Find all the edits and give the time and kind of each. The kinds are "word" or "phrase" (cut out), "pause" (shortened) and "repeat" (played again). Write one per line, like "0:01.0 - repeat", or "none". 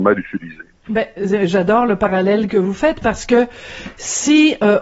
none

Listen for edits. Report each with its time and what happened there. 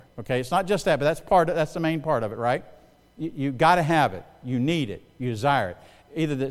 none

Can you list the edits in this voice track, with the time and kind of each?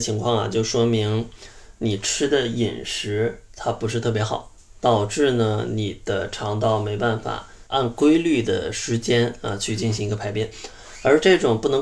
0:07.7 - word

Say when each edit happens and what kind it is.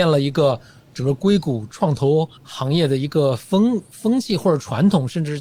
0:02.4 - pause

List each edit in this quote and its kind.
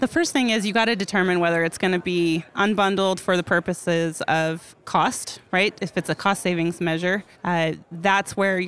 0:07.3 - pause

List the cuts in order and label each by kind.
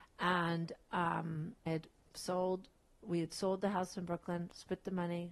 0:01.7 - word
0:03.0 - word

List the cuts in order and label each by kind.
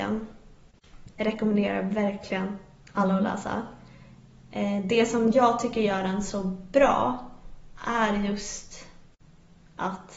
none

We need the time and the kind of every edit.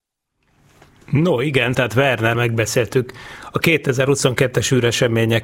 0:01.7 - word
0:02.3 - word

